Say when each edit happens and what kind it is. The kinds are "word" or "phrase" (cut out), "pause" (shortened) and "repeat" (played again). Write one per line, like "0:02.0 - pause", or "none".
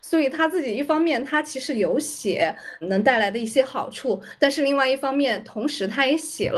0:02.8 - word